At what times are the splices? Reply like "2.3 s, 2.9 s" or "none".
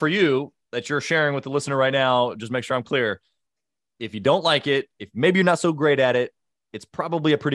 none